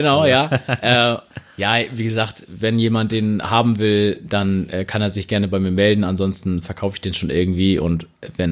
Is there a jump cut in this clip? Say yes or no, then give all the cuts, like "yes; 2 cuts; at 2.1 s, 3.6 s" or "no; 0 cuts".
no; 0 cuts